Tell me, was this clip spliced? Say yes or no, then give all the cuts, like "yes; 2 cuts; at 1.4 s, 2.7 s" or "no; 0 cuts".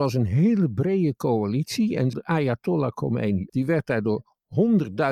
yes; 2 cuts; at 2.1 s, 3.5 s